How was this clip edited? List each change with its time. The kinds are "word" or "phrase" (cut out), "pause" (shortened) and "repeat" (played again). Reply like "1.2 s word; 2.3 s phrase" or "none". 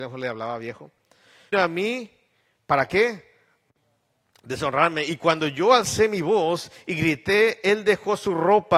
1.5 s word